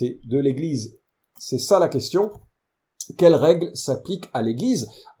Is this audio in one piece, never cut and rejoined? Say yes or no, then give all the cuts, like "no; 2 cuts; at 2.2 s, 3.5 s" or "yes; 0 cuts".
yes; 0 cuts